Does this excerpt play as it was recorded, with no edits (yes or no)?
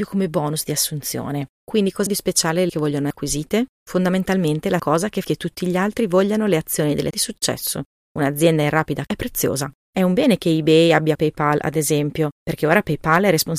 no